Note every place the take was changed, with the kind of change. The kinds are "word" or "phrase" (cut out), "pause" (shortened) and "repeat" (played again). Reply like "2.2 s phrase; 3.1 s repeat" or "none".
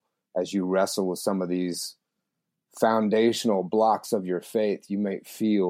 none